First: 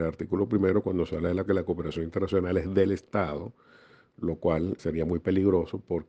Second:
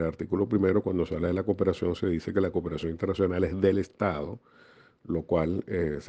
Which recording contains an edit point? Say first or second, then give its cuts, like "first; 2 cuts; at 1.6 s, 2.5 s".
first; 2 cuts; at 1.5 s, 4.8 s